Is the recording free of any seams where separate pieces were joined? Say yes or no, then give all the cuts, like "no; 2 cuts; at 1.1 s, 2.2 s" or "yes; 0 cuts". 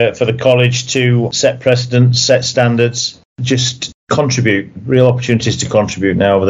yes; 0 cuts